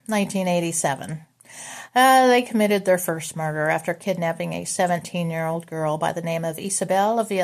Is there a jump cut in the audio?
no; 0 cuts

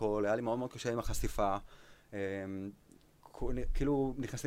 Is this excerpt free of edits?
yes; 0 cuts

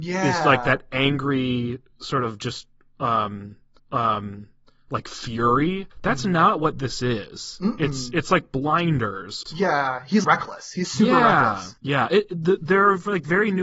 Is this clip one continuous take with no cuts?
no; 6 cuts; at 3.8 s, 5.9 s, 9.5 s, 10.2 s, 10.8 s, 11.8 s

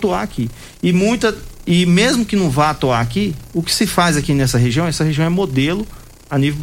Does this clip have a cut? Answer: no; 0 cuts

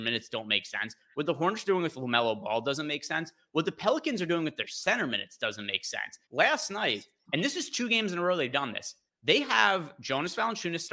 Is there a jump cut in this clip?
yes; 2 cuts; at 6.2 s, 9.1 s

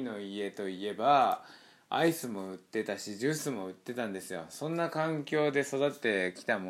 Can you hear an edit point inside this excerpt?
no; 0 cuts

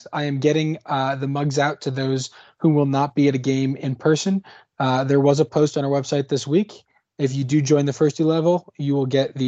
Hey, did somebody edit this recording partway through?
no; 0 cuts

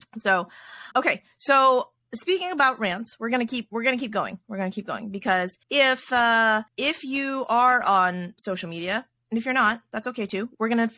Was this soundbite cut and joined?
yes; 3 cuts; at 0.9 s, 5.6 s, 6.7 s

